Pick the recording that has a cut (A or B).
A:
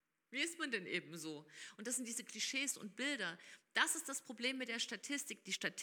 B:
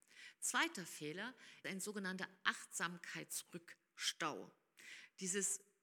B